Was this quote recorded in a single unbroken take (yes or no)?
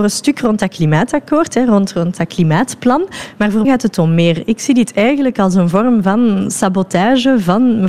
no